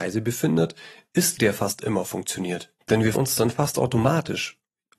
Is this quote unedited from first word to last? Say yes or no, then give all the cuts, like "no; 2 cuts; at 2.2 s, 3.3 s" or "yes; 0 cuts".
no; 3 cuts; at 1.4 s, 2.8 s, 3.1 s